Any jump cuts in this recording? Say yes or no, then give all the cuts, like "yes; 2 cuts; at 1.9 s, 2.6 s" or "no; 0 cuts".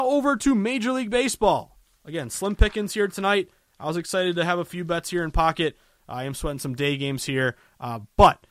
no; 0 cuts